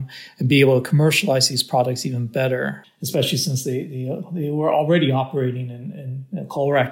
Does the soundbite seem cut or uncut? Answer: cut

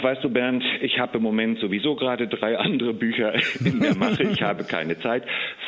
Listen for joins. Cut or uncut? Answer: uncut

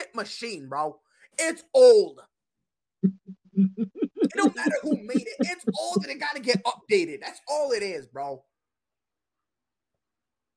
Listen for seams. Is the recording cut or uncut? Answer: uncut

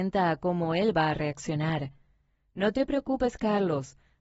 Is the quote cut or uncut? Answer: uncut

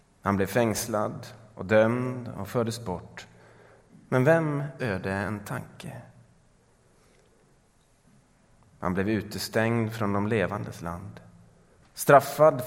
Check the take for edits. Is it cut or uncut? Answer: cut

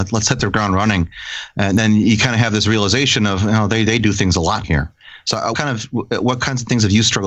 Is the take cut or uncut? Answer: cut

